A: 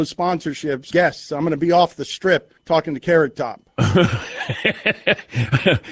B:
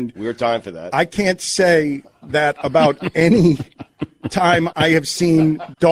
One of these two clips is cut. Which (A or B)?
A